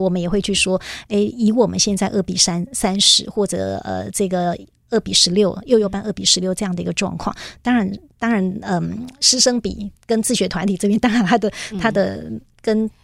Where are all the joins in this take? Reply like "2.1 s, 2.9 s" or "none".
none